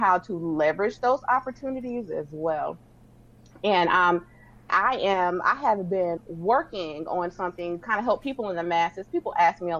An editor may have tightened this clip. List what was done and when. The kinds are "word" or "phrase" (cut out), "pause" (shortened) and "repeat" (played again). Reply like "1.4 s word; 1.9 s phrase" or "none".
4.7 s word; 6.2 s word; 7.8 s word